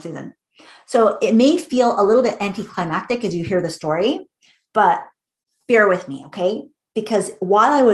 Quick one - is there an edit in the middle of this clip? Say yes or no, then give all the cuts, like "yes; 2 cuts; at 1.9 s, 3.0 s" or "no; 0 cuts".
no; 0 cuts